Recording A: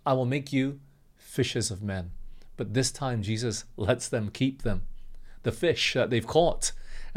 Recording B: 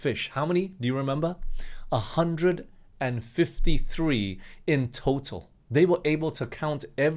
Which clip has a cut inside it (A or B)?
B